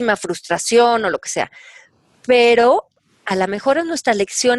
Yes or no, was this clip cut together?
no